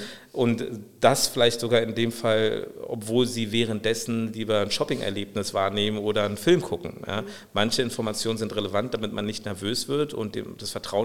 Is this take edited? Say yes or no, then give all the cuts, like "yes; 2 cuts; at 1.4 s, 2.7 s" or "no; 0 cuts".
no; 0 cuts